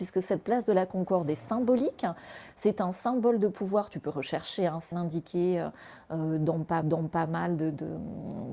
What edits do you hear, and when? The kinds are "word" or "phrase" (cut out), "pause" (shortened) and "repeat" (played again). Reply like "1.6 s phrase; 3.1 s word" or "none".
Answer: 4.9 s word; 6.8 s repeat